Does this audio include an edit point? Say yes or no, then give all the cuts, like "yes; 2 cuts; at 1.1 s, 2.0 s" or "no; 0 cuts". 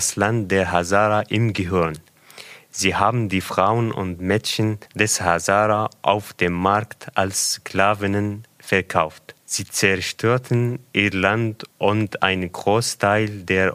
yes; 3 cuts; at 4.9 s, 9.4 s, 11.7 s